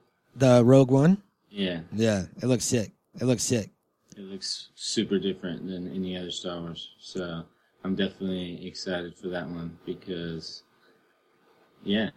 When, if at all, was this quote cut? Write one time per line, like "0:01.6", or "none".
0:03.1